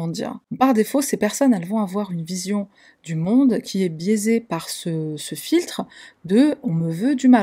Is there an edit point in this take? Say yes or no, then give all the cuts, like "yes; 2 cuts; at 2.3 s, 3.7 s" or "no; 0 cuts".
no; 0 cuts